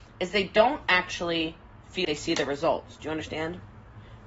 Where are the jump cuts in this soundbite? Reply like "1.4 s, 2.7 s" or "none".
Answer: 2.0 s